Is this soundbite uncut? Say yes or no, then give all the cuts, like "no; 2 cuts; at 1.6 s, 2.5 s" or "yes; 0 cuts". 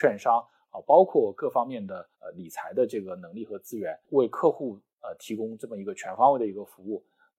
no; 3 cuts; at 2.1 s, 4.0 s, 4.9 s